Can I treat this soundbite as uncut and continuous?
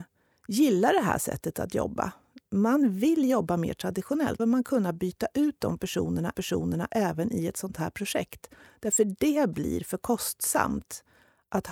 no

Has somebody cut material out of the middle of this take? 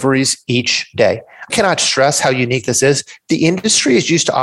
yes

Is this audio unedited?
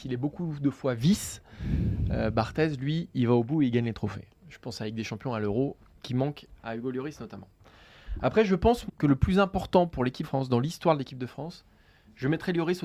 no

